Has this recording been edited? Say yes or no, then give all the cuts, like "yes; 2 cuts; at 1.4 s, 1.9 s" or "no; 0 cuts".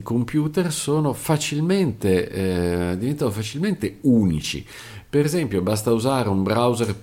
no; 0 cuts